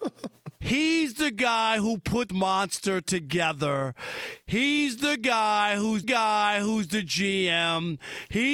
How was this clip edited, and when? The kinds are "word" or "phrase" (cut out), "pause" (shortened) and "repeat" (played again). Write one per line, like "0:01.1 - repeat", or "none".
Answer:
0:02.3 - word
0:06.0 - repeat